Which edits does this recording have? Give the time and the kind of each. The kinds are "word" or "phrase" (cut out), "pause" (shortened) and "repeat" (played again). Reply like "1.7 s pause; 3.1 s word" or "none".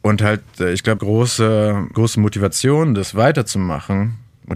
1.0 s word; 1.9 s word